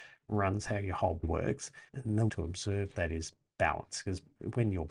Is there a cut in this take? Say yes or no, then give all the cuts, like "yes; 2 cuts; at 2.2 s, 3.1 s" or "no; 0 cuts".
yes; 3 cuts; at 1.2 s, 1.9 s, 2.3 s